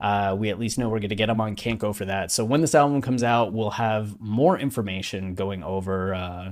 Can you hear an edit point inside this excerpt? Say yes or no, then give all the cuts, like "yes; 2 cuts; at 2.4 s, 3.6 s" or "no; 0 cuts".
no; 0 cuts